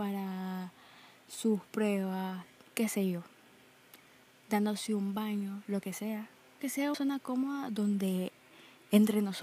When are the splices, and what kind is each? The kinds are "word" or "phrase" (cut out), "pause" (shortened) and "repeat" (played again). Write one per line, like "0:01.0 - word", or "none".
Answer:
0:06.6 - word
0:06.9 - word